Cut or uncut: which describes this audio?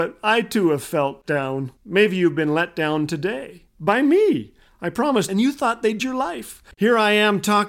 cut